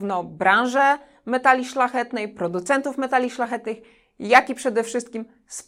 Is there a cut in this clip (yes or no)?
no